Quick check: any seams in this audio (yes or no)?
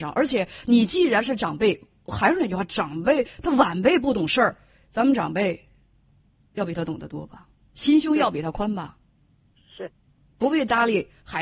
no